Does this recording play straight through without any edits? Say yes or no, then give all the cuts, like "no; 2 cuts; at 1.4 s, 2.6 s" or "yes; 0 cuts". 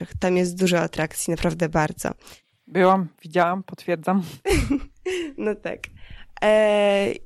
yes; 0 cuts